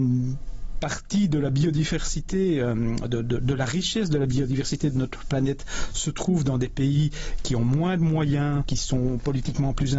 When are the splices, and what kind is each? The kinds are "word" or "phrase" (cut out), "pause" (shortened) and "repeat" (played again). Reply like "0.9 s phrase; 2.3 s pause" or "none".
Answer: none

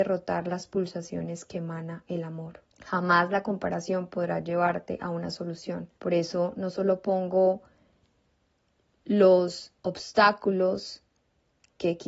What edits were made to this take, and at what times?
2.7 s pause; 6.0 s pause; 9.8 s pause

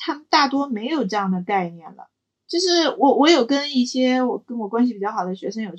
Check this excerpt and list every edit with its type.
2.4 s pause

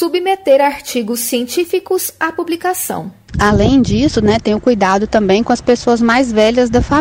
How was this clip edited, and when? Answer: none

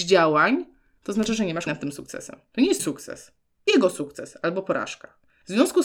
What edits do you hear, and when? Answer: 1.7 s word; 2.8 s word; 3.7 s word

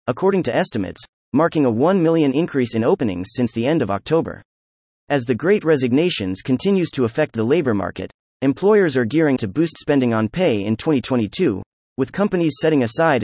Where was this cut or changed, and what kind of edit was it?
9.4 s word

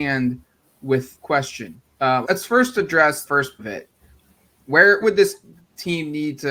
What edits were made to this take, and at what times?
1.1 s word; 2.2 s word; 3.2 s word; 3.6 s word; 5.0 s word

